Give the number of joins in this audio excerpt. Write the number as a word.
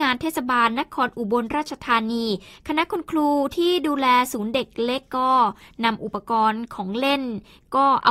zero